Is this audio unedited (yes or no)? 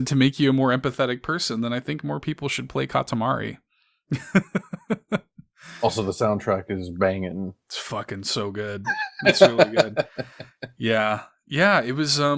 yes